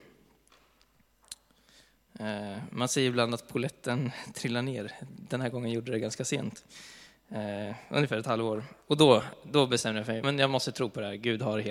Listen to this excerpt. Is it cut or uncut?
cut